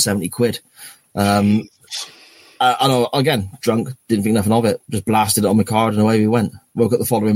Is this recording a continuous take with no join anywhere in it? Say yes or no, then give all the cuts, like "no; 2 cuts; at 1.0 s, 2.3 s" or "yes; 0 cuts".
yes; 0 cuts